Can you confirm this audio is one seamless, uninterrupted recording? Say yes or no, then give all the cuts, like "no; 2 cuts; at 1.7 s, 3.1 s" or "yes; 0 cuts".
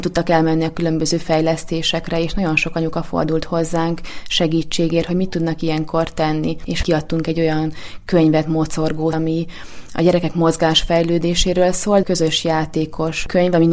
no; 2 cuts; at 9.1 s, 12.0 s